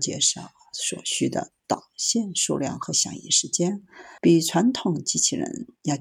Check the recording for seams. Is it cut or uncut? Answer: cut